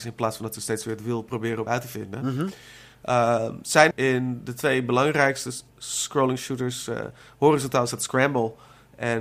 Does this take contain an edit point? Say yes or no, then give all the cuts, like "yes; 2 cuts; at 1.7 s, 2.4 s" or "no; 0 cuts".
yes; 3 cuts; at 1.7 s, 3.9 s, 5.7 s